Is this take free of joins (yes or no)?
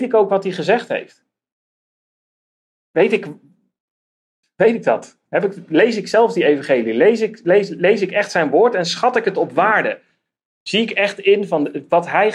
yes